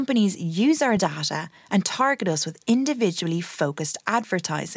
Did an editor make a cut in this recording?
no; 0 cuts

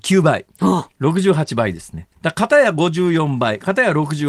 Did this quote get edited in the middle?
yes; 2 cuts; at 0.9 s, 2.1 s

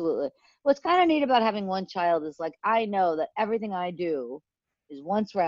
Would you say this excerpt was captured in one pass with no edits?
yes; 0 cuts

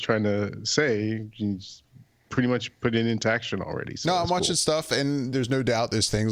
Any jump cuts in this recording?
no; 0 cuts

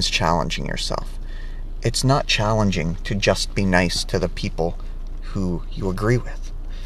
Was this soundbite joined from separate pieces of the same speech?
no; 0 cuts

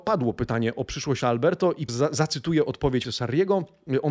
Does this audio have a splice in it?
yes; 3 cuts; at 1.2 s, 1.9 s, 3.0 s

